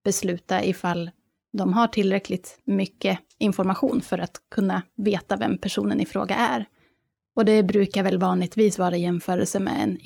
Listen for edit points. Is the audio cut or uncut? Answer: uncut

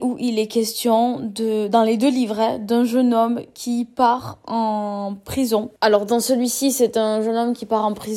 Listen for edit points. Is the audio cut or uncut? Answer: uncut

